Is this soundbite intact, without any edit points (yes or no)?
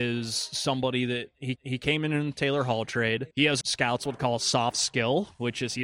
no